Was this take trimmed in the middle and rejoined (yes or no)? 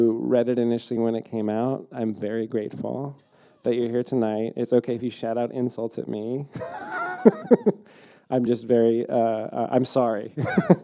no